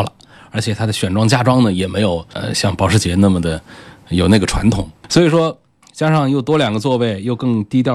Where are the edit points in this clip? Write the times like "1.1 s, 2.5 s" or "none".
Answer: 2.3 s